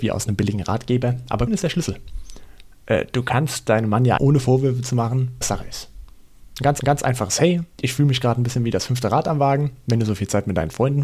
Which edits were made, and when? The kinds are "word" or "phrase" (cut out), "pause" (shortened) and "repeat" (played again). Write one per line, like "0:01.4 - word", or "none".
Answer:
0:01.5 - word
0:04.2 - phrase
0:05.4 - word
0:06.8 - repeat
0:07.7 - pause